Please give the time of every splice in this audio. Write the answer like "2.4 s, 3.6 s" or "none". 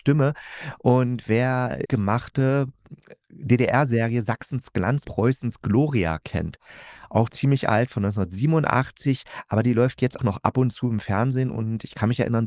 1.9 s, 5.0 s, 7.3 s, 10.2 s